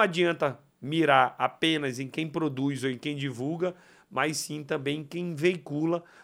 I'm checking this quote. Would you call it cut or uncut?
uncut